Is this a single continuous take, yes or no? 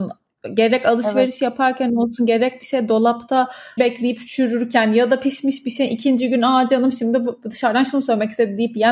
no